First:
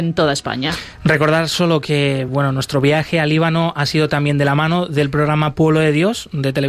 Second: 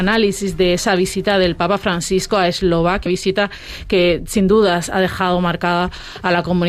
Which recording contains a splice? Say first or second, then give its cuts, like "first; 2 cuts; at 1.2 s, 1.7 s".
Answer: second; 1 cut; at 3.1 s